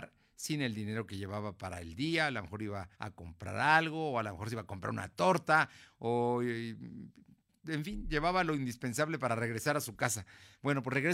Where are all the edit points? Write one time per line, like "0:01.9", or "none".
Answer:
0:02.9